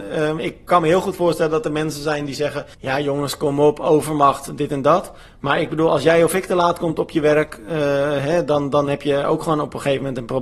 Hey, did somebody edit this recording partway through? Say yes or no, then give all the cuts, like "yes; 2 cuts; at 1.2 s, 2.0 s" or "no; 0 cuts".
yes; 1 cut; at 2.7 s